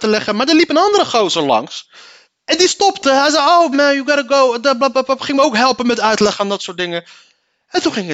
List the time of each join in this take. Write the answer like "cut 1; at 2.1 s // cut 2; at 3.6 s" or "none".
cut 1; at 2.2 s // cut 2; at 3.7 s